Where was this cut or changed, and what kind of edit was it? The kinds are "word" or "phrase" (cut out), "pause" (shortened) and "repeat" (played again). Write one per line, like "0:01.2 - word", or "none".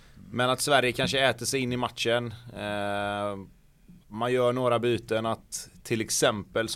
0:04.0 - pause